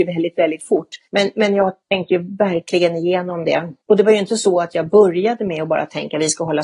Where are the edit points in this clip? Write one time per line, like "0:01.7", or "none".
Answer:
0:01.0
0:01.8
0:03.8